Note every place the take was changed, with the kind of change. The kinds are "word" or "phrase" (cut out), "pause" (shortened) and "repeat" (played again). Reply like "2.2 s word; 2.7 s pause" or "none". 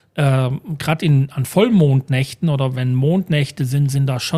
none

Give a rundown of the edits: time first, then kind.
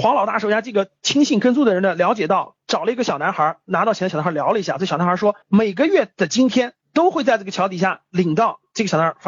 2.6 s pause; 5.4 s pause; 6.8 s pause

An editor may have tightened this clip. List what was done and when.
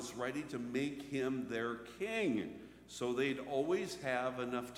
none

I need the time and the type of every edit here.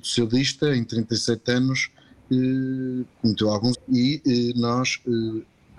3.7 s word

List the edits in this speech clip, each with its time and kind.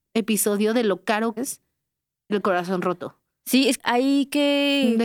1.4 s word; 2.3 s word; 3.8 s word

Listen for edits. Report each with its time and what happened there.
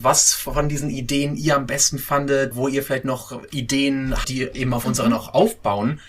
2.5 s word; 4.2 s phrase

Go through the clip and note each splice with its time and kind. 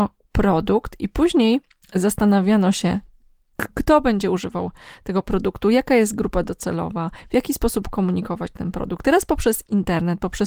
1.8 s pause

